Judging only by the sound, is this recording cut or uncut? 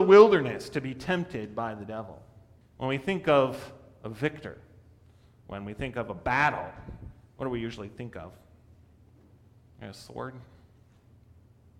cut